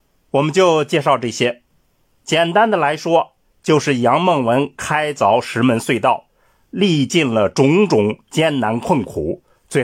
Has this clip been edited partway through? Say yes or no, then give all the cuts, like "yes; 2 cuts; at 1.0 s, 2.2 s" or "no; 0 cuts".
no; 0 cuts